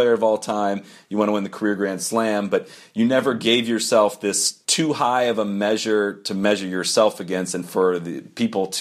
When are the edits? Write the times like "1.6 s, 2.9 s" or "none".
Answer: 4.6 s